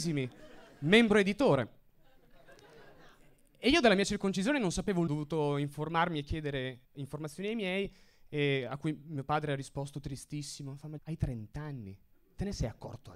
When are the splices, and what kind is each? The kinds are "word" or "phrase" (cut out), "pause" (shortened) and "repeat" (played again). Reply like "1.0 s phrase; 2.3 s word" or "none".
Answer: 5.1 s phrase; 6.8 s pause; 11.0 s word